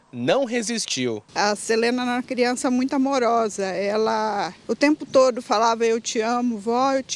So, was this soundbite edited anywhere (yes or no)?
yes